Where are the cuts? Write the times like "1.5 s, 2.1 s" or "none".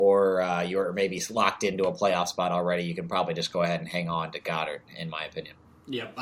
none